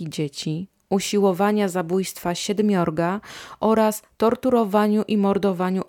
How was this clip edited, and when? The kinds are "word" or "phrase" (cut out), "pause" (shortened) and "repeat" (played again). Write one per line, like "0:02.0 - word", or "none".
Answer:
none

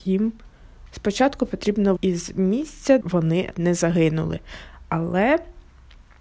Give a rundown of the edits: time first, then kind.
0:02.0 - word
0:03.0 - word
0:03.5 - word

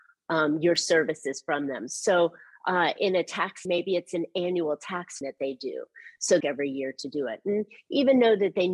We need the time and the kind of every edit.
0:03.7 - word
0:05.2 - word
0:06.4 - phrase

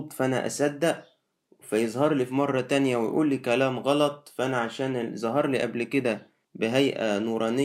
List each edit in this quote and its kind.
0:06.4 - pause

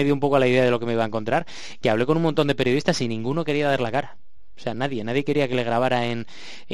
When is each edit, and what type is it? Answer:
none

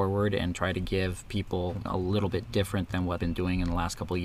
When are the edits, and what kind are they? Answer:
0:01.9 - word
0:03.2 - word

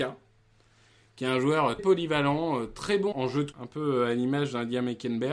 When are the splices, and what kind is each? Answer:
0:01.8 - word
0:03.1 - word
0:03.5 - word

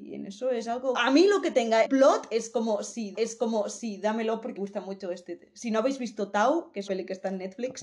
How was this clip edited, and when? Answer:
0:00.9 - word
0:01.8 - word
0:03.1 - repeat
0:04.6 - word
0:06.9 - word

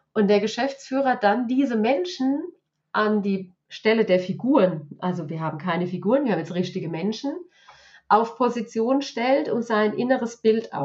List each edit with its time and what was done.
none

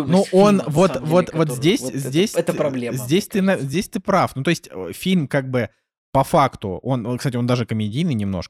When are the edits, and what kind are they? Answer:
none

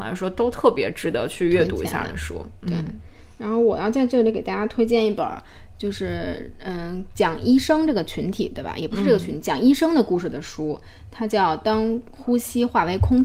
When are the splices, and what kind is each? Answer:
none

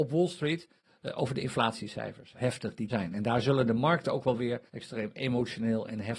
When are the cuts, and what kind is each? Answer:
0:02.3 - phrase
0:02.9 - word
0:04.7 - pause

